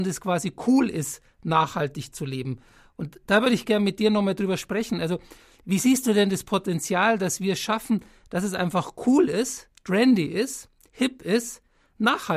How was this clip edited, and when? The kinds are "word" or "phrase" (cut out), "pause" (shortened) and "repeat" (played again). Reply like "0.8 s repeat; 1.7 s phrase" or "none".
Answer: none